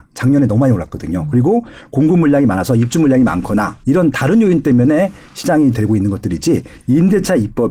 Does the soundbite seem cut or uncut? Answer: cut